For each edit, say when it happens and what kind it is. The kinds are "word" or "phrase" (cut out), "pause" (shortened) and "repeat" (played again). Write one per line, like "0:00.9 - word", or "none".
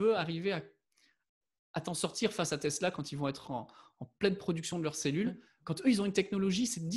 none